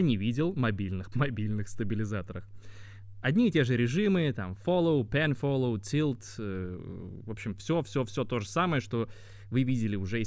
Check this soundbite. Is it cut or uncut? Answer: cut